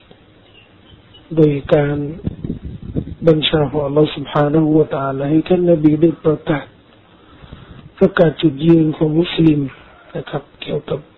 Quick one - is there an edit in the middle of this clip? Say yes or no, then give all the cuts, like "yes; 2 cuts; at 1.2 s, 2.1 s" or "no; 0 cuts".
no; 0 cuts